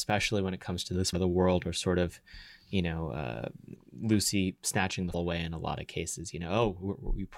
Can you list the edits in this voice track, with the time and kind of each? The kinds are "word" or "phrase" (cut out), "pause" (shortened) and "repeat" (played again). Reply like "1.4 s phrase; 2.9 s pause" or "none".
1.1 s word; 3.8 s word; 5.1 s word